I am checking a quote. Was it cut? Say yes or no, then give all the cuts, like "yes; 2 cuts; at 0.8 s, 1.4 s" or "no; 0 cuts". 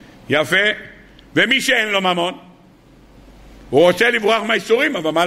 no; 0 cuts